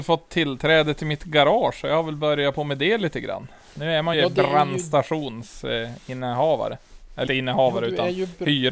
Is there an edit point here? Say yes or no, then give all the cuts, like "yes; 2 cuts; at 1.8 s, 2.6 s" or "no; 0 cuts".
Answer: yes; 2 cuts; at 4.1 s, 7.3 s